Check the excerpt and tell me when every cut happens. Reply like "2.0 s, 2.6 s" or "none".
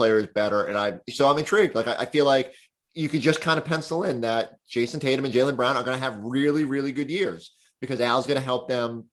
none

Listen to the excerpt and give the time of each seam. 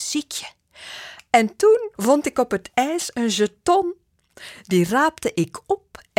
1.9 s

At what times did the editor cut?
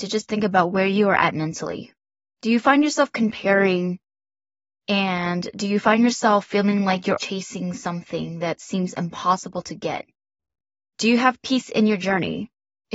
7.2 s

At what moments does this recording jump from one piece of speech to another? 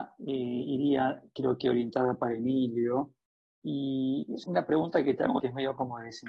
4.4 s, 5.4 s

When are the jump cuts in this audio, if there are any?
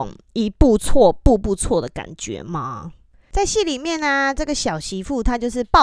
none

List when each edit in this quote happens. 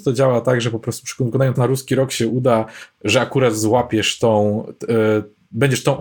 1.6 s

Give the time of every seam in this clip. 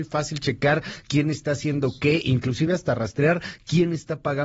none

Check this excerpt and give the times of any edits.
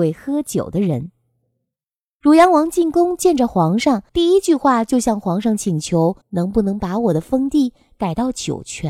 4.1 s, 6.2 s

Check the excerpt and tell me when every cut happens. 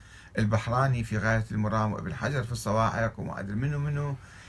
none

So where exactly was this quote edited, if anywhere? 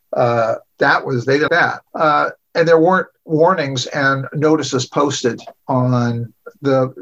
1.5 s, 1.9 s, 5.6 s

